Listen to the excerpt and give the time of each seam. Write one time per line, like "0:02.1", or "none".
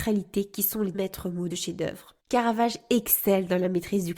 0:00.9
0:01.5
0:02.2